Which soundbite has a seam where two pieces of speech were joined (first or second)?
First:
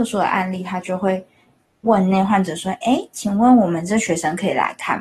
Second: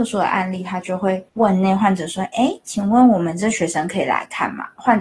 second